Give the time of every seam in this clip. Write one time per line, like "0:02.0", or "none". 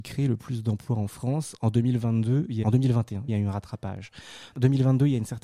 0:02.6
0:03.3